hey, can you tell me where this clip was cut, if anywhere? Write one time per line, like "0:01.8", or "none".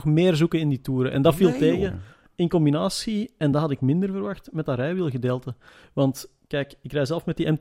none